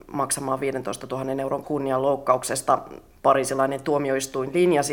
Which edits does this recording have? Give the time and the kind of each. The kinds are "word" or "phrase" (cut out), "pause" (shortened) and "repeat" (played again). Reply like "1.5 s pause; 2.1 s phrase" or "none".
1.6 s word

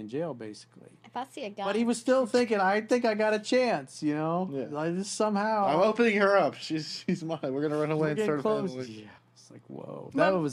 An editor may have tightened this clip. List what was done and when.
9.2 s pause

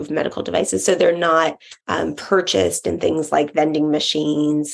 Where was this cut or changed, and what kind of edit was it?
1.8 s pause

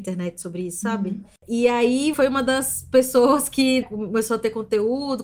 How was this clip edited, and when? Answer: 2.1 s word; 3.8 s word

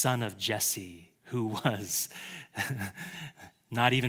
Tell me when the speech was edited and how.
1.2 s pause

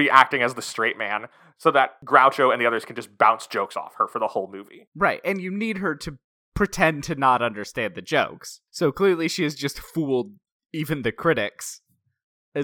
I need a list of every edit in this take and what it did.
none

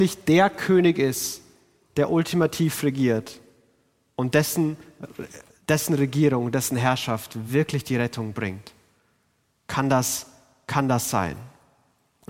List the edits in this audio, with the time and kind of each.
none

